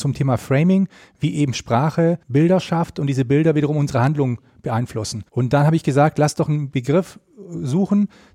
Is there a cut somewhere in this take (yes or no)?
yes